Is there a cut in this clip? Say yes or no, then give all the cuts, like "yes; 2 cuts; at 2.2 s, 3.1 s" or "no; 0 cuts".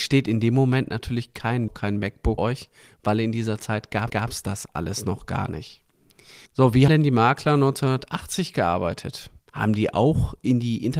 yes; 6 cuts; at 1.7 s, 2.4 s, 4.1 s, 6.5 s, 6.9 s, 9.4 s